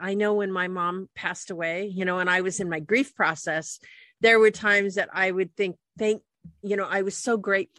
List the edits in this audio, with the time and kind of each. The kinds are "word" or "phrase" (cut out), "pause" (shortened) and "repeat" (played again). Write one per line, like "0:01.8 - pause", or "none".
none